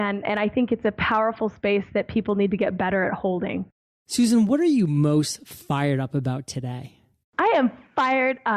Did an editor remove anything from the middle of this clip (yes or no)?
no